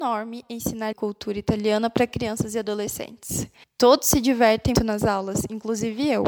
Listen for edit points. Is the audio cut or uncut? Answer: cut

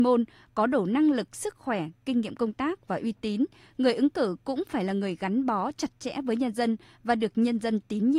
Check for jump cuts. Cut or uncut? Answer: uncut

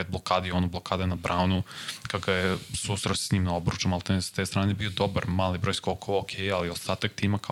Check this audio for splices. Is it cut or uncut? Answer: uncut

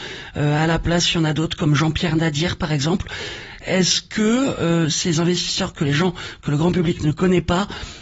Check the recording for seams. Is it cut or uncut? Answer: uncut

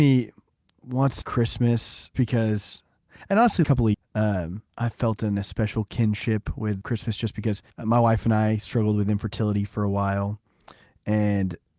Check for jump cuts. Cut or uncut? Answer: cut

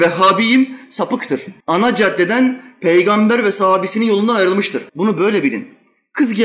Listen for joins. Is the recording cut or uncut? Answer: cut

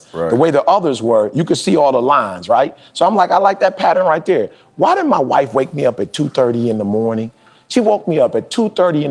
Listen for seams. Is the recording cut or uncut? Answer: uncut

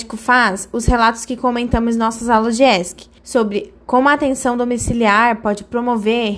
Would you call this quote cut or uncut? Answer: cut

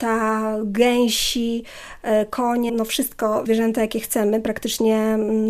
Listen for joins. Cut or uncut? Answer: cut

